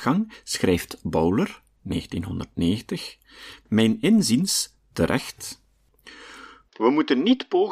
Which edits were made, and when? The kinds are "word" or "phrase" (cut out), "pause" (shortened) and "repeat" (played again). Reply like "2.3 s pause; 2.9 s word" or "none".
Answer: none